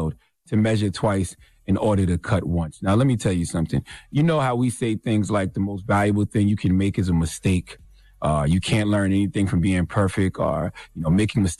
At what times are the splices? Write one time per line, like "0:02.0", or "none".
none